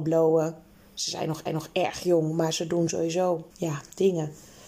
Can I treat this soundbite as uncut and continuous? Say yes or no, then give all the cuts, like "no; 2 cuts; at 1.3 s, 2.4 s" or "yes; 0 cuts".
no; 2 cuts; at 1.5 s, 3.5 s